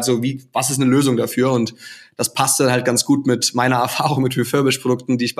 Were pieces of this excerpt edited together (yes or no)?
no